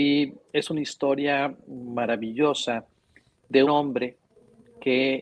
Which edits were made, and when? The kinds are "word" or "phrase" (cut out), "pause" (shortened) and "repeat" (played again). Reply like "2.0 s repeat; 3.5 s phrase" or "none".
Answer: 3.6 s word